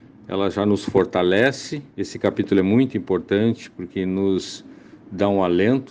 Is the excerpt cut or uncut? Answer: cut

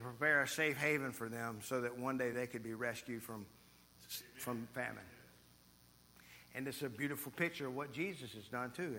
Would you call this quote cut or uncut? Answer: uncut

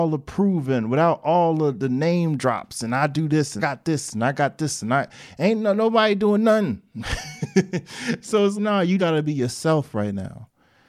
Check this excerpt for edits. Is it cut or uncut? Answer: cut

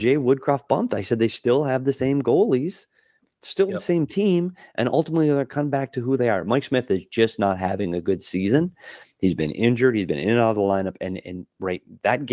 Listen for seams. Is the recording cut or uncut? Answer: uncut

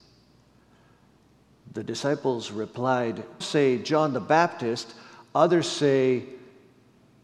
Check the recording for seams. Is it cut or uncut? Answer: cut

